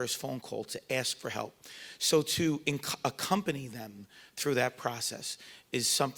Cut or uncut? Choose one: uncut